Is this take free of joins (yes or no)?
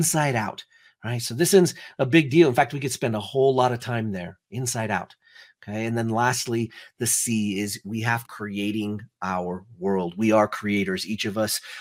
no